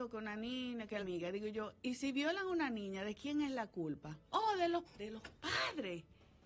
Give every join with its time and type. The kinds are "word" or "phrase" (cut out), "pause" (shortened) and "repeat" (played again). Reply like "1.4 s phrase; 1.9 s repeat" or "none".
1.0 s phrase; 4.3 s pause; 4.9 s word

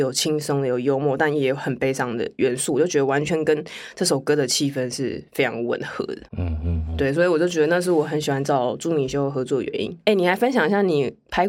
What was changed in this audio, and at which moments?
6.3 s pause; 6.9 s word

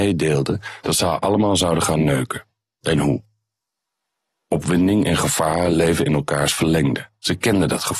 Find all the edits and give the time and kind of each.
none

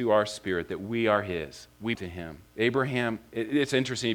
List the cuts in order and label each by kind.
1.9 s word; 2.5 s pause

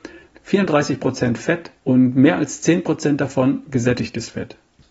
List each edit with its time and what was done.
1.8 s pause

